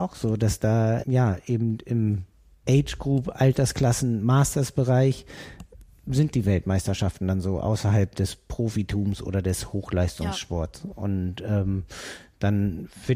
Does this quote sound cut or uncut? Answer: cut